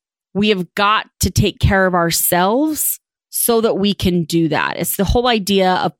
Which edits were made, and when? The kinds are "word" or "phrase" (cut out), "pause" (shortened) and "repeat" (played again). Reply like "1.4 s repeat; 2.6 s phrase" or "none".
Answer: none